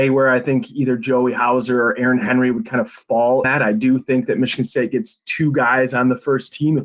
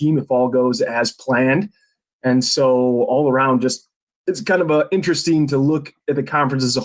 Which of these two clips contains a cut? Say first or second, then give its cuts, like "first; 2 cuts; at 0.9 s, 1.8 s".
first; 1 cut; at 3.4 s